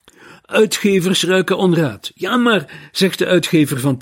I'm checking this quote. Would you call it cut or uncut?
uncut